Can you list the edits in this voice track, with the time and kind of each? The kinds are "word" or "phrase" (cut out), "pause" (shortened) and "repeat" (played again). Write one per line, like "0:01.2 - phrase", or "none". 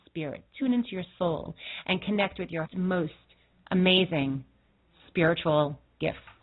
0:02.7 - word

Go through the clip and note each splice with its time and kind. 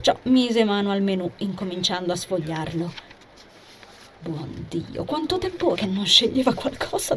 0:05.7 - word

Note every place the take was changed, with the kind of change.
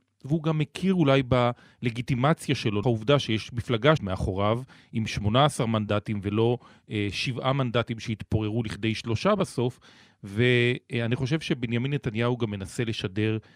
0:02.8 - word
0:04.0 - word

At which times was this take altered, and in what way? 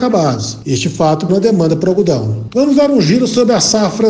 0:01.3 - word

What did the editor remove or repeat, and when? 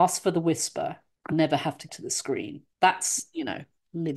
0:01.3 - word
0:01.9 - word

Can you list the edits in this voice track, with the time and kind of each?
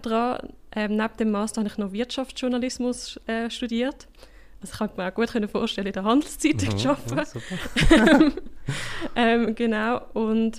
none

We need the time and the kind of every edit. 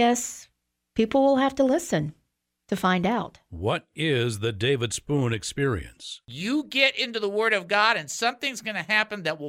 none

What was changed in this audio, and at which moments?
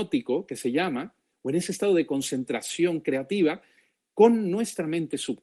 none

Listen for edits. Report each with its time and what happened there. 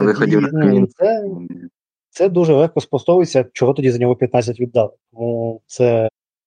none

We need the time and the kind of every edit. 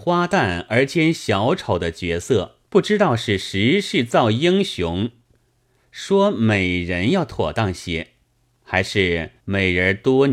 0:02.7 - pause
0:09.4 - pause

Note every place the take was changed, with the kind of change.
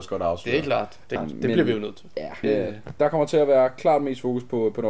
0:01.2 - word
0:02.4 - word

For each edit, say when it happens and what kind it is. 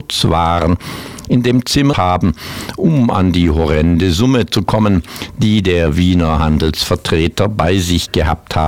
0:01.9 - phrase

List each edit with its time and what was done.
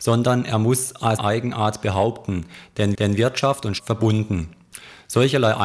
0:01.2 - word
0:03.0 - repeat
0:03.8 - phrase

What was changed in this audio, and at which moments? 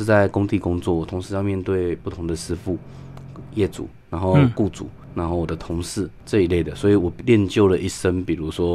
0:04.0 - pause

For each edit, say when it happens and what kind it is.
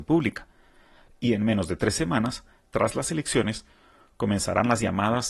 none

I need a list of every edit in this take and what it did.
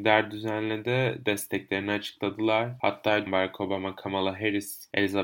0:03.3 - phrase

